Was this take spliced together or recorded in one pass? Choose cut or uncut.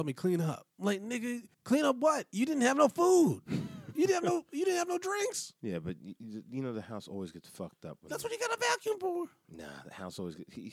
cut